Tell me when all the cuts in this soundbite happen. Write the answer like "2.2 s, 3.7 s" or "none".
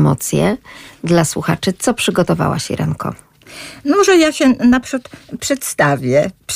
none